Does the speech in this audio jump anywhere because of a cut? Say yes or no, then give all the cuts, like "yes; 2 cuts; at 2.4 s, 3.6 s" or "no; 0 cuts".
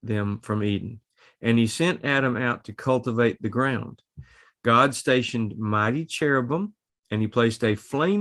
no; 0 cuts